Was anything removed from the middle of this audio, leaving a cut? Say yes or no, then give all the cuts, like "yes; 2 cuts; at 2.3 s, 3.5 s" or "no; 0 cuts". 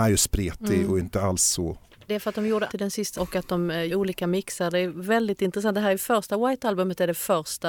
yes; 4 cuts; at 2.1 s, 2.7 s, 3.2 s, 3.9 s